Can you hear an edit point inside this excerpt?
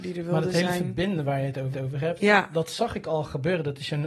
yes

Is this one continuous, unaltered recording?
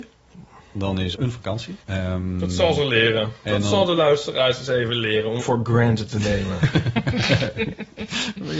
no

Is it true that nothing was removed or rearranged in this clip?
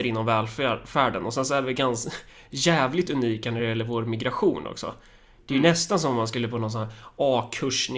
yes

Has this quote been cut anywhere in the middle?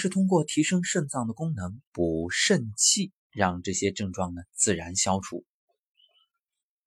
yes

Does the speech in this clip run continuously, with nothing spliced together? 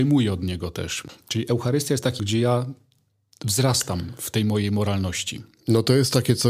no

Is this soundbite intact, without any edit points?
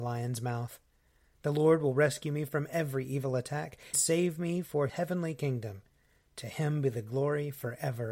no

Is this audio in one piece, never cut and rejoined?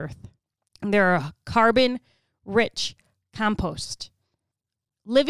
yes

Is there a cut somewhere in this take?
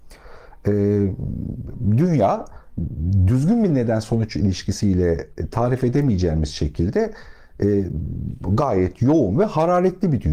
no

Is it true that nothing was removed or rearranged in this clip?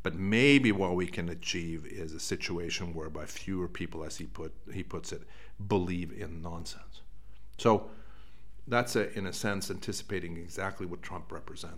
yes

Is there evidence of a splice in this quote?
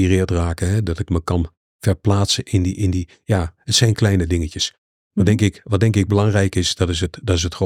no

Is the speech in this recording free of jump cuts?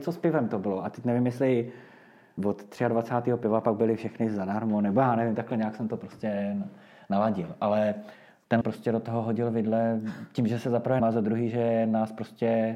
no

